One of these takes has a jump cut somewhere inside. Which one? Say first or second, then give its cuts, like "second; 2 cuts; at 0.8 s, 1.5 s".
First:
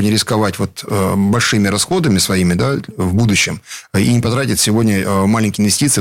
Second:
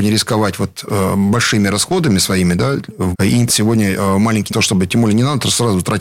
second; 3 cuts; at 3.1 s, 3.5 s, 4.5 s